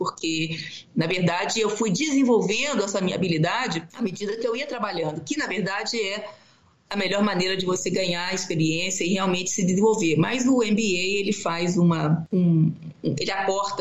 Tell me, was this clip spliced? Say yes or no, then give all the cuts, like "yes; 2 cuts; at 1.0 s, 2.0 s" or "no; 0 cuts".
no; 0 cuts